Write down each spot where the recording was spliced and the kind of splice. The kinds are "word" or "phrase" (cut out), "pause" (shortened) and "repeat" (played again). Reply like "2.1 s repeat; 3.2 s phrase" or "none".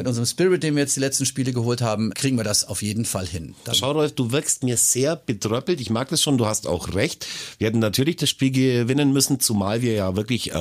2.1 s word; 3.7 s word